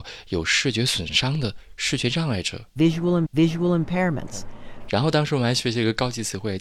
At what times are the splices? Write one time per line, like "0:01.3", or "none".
0:03.3

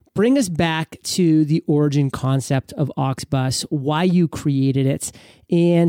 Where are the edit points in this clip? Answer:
none

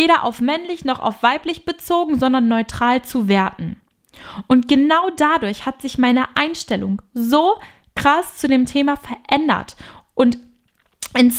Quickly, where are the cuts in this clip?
none

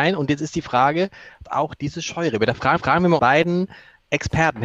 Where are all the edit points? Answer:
0:01.5
0:01.8
0:02.8
0:03.2

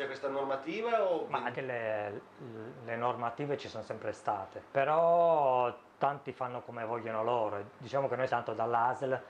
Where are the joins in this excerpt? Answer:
0:01.5
0:04.7
0:08.3

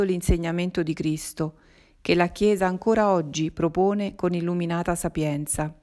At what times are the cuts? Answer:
none

